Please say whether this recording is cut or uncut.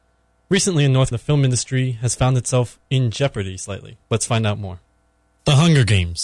cut